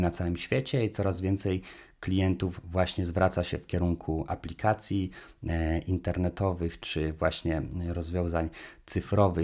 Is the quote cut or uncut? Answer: uncut